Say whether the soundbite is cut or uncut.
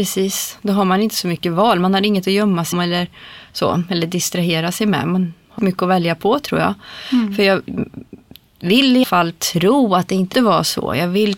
cut